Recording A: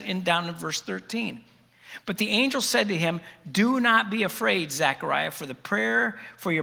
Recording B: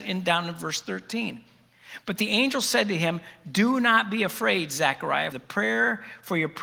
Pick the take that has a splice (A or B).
B